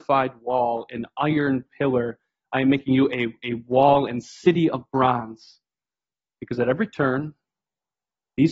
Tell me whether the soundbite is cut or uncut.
uncut